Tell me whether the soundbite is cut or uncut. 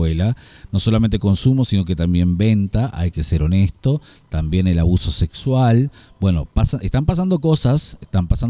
uncut